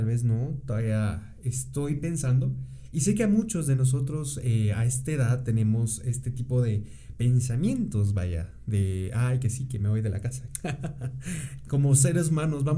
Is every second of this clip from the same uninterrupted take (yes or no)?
yes